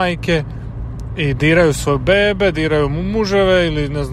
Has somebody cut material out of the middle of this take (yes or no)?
yes